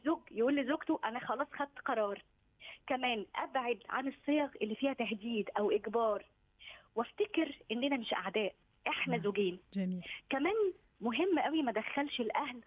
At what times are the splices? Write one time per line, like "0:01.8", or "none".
none